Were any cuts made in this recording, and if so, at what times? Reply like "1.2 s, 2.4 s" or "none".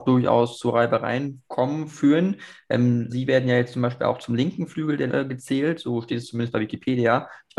1.5 s, 3.1 s, 5.1 s